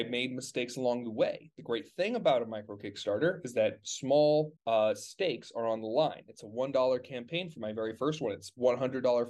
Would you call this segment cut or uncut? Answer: cut